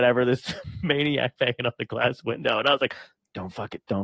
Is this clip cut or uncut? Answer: uncut